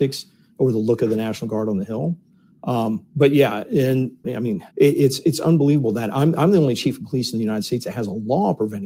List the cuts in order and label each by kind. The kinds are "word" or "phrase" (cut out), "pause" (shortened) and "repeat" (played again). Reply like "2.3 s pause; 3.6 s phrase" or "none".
3.1 s pause; 4.2 s phrase; 4.7 s pause